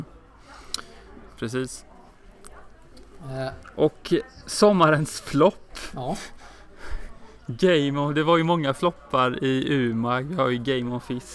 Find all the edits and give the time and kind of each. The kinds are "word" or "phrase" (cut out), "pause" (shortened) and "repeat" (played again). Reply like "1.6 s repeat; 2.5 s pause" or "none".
none